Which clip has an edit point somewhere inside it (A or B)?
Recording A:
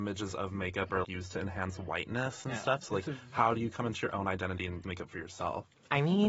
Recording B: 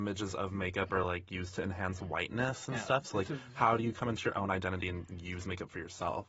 A